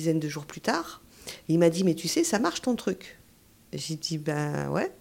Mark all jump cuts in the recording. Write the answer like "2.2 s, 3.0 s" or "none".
none